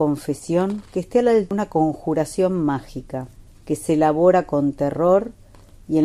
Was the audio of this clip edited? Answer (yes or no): yes